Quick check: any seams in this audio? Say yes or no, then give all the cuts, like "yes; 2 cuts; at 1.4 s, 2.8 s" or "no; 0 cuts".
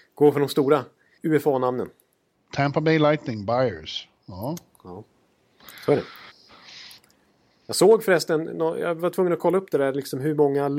no; 0 cuts